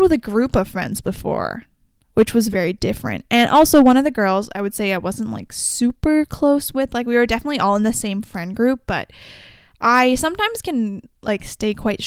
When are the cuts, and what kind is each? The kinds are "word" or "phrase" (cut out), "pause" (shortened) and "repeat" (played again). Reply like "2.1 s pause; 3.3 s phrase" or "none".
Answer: 2.5 s word